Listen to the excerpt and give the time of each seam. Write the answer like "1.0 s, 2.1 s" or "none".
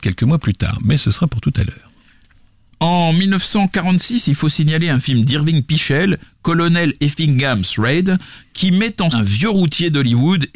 9.1 s